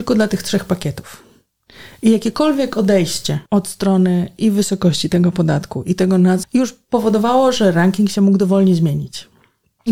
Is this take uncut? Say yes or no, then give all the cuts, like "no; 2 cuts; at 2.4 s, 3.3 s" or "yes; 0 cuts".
no; 2 cuts; at 3.5 s, 6.4 s